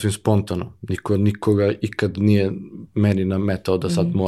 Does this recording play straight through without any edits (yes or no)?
yes